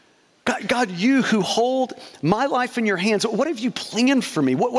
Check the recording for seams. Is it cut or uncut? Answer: uncut